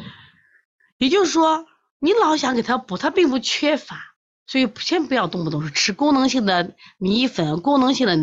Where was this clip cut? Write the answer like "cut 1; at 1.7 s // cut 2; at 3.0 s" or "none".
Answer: cut 1; at 4.2 s